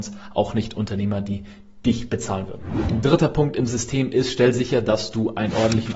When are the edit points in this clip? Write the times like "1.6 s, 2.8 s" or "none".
none